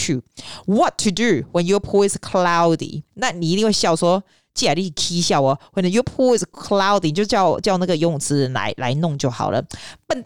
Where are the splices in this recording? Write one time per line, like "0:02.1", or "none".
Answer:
0:03.1